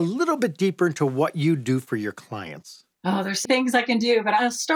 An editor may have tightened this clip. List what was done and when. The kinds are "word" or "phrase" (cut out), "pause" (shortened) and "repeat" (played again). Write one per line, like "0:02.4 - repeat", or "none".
0:02.9 - pause
0:03.4 - word